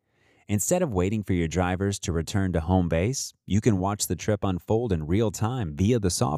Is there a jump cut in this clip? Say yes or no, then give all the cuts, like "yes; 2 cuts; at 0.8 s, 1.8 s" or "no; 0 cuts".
no; 0 cuts